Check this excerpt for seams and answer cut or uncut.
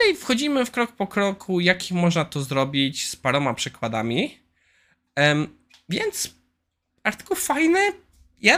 uncut